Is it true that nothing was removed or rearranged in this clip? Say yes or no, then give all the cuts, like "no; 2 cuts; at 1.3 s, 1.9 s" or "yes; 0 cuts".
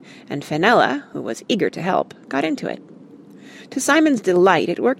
yes; 0 cuts